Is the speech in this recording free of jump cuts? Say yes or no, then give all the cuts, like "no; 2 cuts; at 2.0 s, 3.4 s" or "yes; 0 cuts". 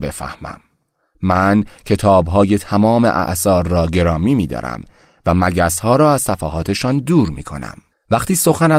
yes; 0 cuts